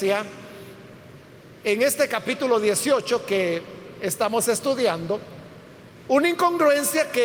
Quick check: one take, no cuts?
yes; 0 cuts

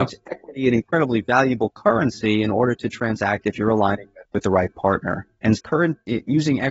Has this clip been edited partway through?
yes; 1 cut; at 4.3 s

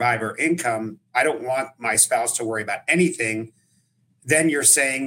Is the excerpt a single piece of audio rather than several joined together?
yes; 0 cuts

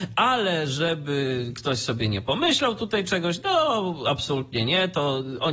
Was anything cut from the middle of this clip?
no; 0 cuts

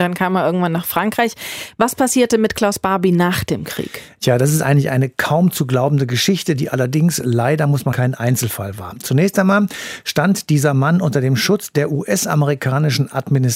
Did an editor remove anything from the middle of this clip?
yes; 1 cut; at 7.9 s

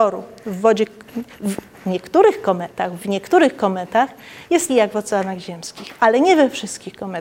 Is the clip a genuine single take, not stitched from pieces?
no; 2 cuts; at 3.0 s, 4.7 s

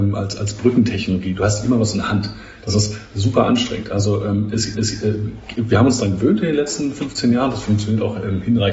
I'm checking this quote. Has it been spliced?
yes; 1 cut; at 4.7 s

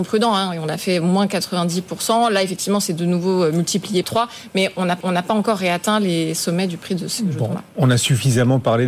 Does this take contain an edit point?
yes; 2 cuts; at 4.0 s, 5.0 s

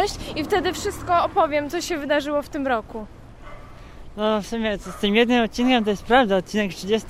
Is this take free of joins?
yes; 0 cuts

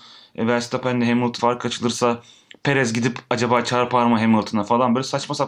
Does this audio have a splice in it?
yes; 1 cut; at 1.4 s

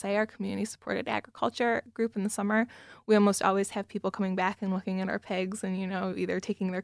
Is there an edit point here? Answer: no; 0 cuts

